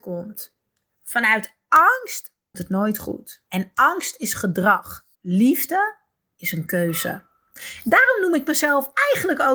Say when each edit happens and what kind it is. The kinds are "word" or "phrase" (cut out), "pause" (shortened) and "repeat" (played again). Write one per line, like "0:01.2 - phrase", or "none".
0:02.5 - word
0:03.5 - pause
0:05.1 - pause